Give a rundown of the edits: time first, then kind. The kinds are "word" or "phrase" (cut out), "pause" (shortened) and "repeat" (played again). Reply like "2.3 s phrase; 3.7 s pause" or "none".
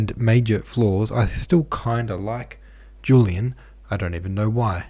none